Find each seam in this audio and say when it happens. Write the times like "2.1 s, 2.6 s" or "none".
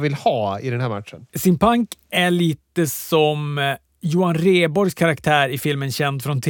1.3 s

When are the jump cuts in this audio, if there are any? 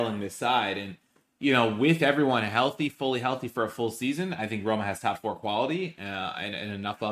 none

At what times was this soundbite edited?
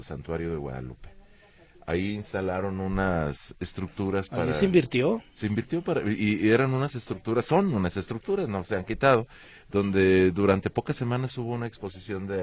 none

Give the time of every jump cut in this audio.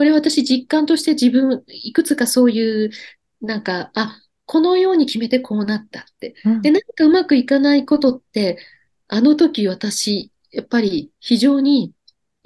none

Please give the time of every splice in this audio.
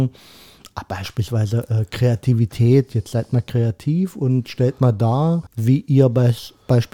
5.5 s

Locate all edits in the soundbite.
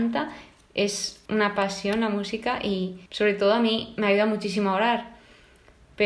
1.2 s, 3.1 s

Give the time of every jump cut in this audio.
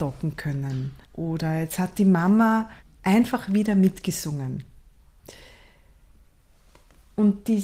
1.0 s, 2.8 s

